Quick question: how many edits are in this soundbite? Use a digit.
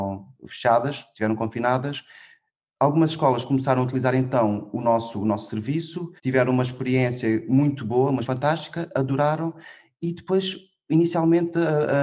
2